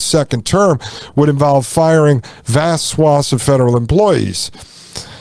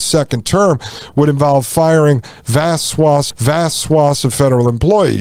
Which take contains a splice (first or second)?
second